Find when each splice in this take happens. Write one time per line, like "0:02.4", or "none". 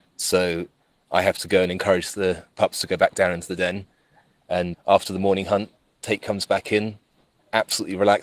0:04.7